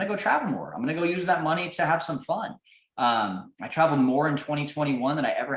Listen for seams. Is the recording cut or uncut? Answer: uncut